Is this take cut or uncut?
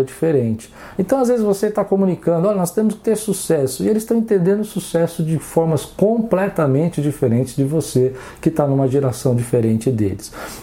uncut